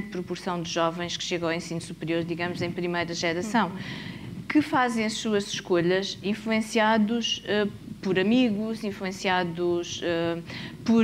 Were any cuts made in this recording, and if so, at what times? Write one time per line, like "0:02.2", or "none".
none

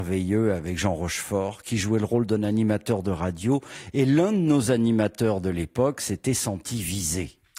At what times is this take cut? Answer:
none

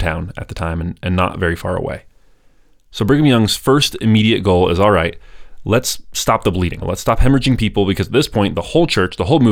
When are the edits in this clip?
none

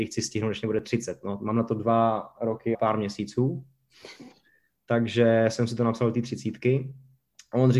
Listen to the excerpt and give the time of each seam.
0:02.7

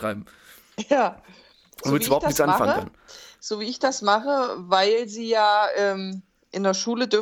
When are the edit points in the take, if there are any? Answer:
none

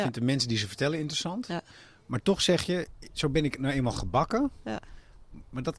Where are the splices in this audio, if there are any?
none

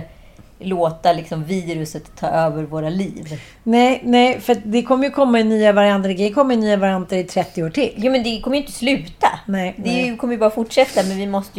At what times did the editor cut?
none

